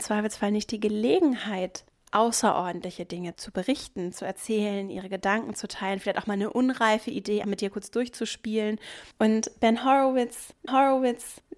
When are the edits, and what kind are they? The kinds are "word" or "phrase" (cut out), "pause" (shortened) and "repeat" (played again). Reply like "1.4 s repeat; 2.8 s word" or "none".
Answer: 3.3 s word; 7.4 s word; 9.1 s pause; 10.7 s repeat